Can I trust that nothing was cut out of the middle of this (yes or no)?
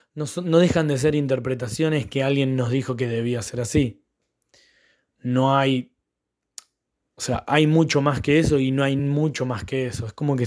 yes